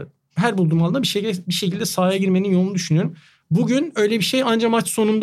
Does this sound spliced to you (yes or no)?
no